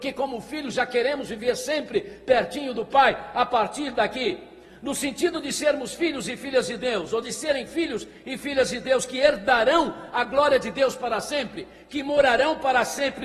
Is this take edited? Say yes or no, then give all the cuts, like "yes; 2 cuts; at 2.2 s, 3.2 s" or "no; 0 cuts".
no; 0 cuts